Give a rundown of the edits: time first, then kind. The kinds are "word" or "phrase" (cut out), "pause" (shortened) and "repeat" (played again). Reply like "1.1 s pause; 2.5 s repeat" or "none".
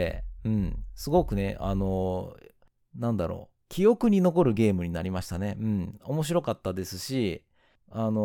3.6 s pause